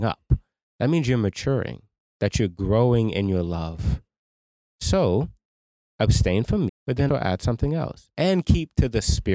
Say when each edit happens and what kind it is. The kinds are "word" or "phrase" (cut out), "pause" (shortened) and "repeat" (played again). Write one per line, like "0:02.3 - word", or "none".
0:06.7 - word
0:07.1 - word